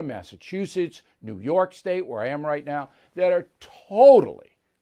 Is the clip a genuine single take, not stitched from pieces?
yes; 0 cuts

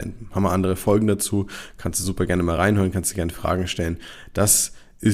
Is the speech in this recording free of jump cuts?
yes; 0 cuts

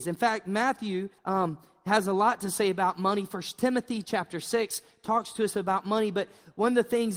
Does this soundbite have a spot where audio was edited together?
yes; 1 cut; at 1.2 s

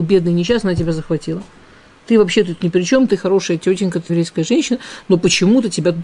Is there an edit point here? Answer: yes; 1 cut; at 4.1 s

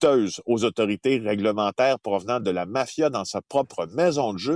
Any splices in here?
no; 0 cuts

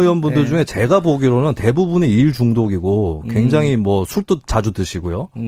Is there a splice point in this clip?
no; 0 cuts

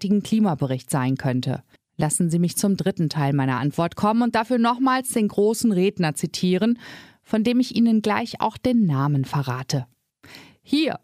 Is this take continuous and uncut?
no; 1 cut; at 1.8 s

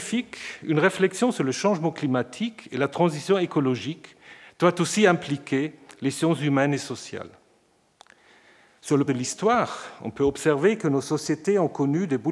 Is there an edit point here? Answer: yes; 1 cut; at 9.1 s

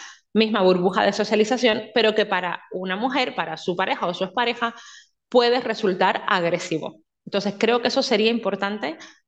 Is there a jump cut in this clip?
no; 0 cuts

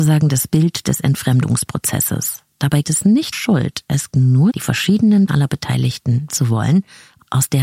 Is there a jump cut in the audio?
yes; 6 cuts; at 2.8 s, 3.3 s, 4.1 s, 4.5 s, 5.3 s, 6.3 s

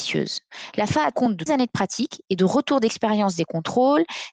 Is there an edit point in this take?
yes; 2 cuts; at 1.1 s, 1.5 s

